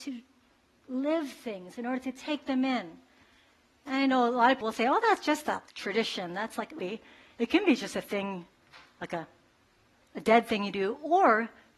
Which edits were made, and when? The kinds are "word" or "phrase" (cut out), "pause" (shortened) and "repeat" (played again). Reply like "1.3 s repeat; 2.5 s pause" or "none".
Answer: 4.6 s word; 5.7 s pause; 6.8 s phrase